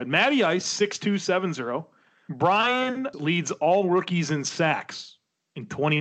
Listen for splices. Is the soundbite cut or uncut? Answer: cut